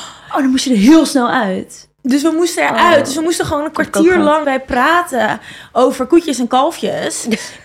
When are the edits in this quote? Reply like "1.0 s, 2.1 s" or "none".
4.4 s